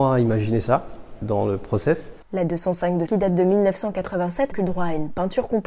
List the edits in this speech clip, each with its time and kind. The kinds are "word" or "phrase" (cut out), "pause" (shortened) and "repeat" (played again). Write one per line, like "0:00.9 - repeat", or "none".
0:01.2 - word
0:02.2 - pause
0:03.1 - word
0:04.5 - word